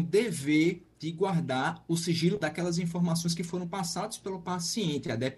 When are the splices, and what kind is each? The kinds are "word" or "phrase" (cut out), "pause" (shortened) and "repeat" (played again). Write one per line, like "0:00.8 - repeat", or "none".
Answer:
0:02.4 - word